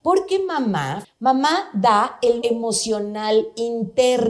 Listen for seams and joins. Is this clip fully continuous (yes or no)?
no